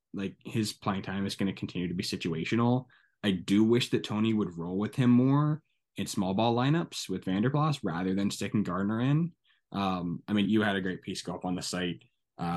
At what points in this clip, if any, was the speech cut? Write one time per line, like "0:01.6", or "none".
0:10.4